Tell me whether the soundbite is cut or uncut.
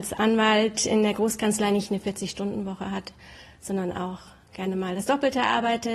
uncut